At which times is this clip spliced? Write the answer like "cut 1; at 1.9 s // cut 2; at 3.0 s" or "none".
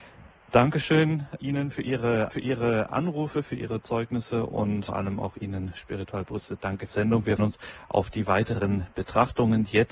cut 1; at 1.4 s // cut 2; at 2.3 s // cut 3; at 4.9 s // cut 4; at 6.9 s // cut 5; at 7.4 s